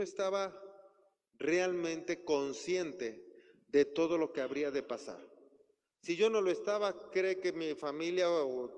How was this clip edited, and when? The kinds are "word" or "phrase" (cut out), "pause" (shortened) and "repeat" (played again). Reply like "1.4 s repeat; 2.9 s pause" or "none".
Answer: none